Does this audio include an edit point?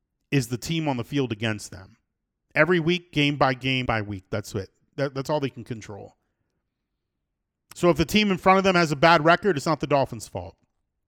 yes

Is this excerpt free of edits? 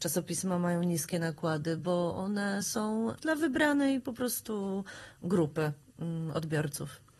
yes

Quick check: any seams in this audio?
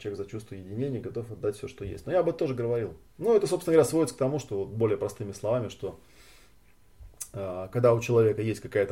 no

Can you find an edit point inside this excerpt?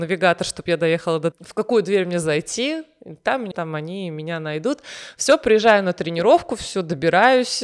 yes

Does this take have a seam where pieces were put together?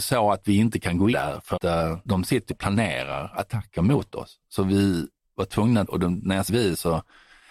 yes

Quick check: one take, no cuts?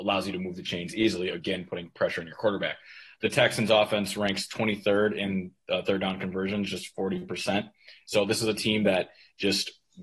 yes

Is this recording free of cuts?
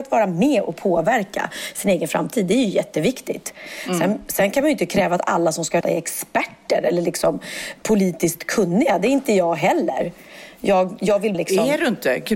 no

